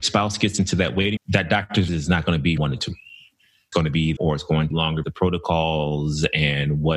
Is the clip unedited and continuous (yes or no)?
no